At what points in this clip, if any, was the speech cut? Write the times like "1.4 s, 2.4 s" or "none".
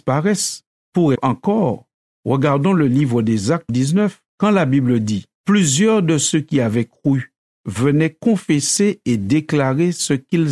1.1 s, 3.7 s